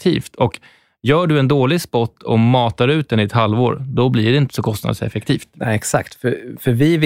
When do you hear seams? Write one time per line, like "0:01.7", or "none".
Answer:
none